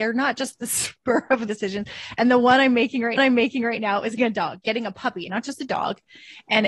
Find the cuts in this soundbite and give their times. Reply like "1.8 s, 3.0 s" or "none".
1.5 s, 3.2 s, 4.2 s, 5.3 s